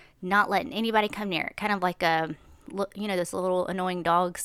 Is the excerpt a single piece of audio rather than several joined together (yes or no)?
yes